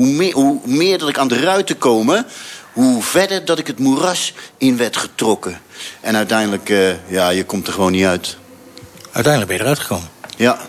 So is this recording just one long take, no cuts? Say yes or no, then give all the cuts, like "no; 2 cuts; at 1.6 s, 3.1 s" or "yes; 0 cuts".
no; 1 cut; at 1.3 s